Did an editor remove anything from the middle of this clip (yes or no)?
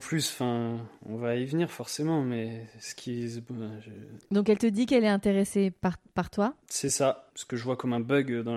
no